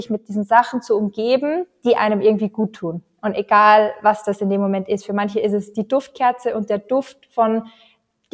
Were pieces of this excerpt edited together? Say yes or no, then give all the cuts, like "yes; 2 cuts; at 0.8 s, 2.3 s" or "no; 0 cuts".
no; 0 cuts